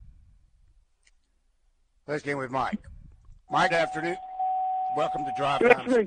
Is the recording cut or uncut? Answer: cut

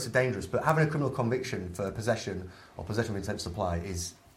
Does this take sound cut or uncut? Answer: uncut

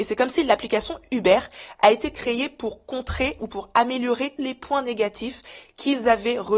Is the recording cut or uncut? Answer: cut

